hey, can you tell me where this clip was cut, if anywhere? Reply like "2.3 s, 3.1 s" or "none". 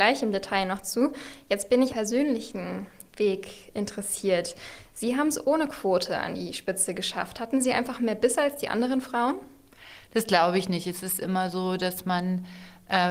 1.9 s